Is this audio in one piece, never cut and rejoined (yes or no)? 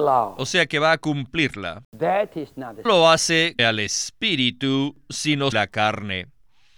no